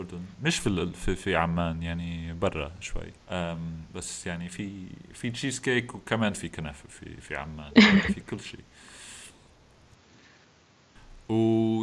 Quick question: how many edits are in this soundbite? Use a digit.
1